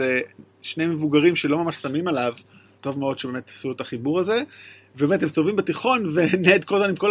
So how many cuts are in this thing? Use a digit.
0